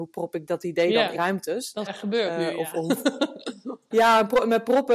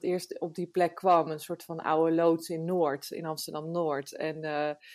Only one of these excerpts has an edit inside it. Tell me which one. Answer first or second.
first